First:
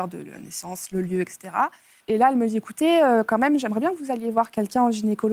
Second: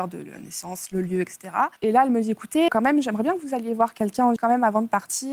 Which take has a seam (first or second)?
second